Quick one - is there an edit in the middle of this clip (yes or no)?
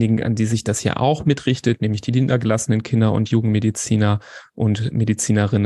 no